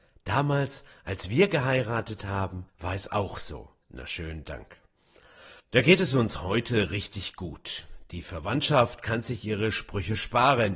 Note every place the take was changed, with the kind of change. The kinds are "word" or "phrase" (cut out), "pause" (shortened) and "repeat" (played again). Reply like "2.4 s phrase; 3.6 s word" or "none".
2.7 s pause; 3.8 s pause; 5.6 s pause